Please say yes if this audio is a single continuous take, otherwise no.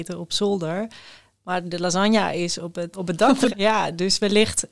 no